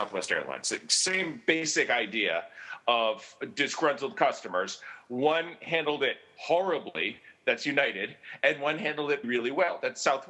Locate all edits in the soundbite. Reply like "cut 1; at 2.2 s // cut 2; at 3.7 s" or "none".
cut 1; at 9.2 s